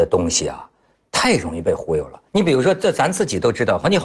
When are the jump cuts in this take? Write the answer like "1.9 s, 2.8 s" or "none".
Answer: 2.3 s